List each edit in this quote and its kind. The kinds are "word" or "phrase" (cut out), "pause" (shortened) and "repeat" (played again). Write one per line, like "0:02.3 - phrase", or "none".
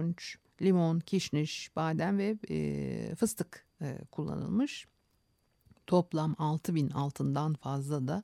none